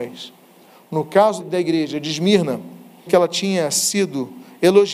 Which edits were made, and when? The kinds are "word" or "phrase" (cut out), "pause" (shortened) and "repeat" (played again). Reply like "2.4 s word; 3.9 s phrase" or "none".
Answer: 1.4 s word; 3.1 s word